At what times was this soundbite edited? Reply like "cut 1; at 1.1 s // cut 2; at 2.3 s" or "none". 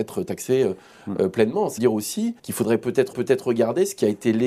cut 1; at 1.8 s // cut 2; at 2.4 s // cut 3; at 3.1 s